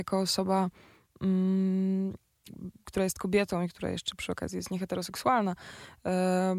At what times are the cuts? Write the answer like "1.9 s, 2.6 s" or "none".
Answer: none